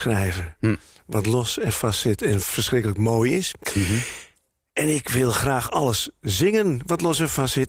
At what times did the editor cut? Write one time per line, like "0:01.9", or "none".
none